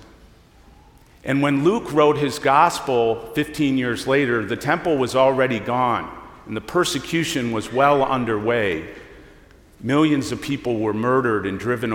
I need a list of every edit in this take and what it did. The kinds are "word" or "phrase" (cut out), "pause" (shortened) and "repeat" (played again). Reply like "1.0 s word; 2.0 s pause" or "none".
none